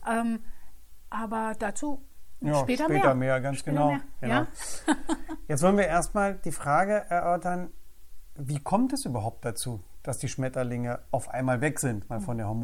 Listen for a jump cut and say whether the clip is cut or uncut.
uncut